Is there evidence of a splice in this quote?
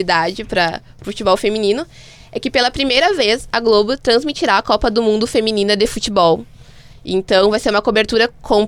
no; 0 cuts

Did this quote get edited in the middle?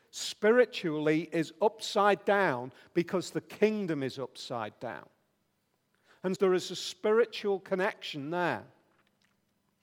yes; 1 cut; at 6.4 s

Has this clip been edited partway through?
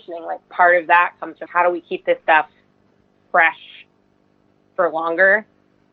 yes; 1 cut; at 1.5 s

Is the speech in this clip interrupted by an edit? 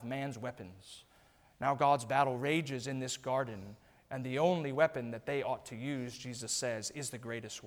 no; 0 cuts

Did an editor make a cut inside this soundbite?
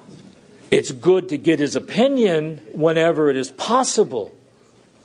no; 0 cuts

